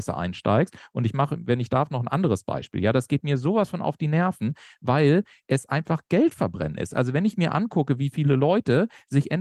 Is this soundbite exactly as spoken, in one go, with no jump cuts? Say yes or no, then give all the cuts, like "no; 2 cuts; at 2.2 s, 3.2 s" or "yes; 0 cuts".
yes; 0 cuts